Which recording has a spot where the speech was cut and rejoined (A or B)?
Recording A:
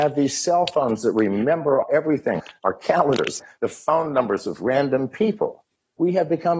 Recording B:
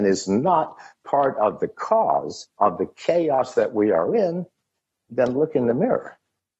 B